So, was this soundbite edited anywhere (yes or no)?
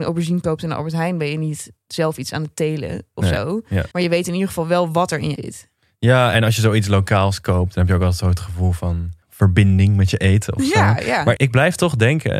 yes